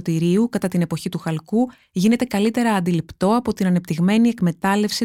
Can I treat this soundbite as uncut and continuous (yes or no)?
yes